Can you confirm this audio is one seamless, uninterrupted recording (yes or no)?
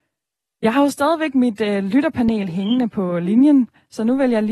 yes